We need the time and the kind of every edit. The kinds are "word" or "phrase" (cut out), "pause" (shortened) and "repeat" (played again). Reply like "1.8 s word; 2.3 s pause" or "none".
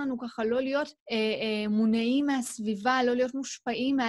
1.0 s pause